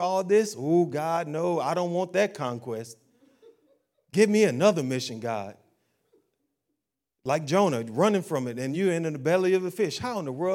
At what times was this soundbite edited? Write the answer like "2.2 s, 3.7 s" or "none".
none